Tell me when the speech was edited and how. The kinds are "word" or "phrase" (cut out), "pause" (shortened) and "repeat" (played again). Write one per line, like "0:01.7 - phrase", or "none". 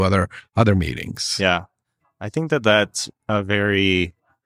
none